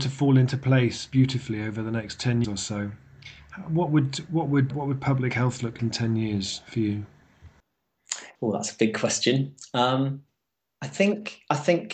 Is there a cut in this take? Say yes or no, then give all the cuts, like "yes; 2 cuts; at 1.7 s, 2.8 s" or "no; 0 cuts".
yes; 5 cuts; at 2.4 s, 4.7 s, 5.8 s, 8.3 s, 10.3 s